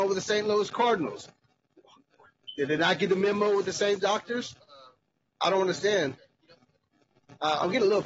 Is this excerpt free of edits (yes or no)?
yes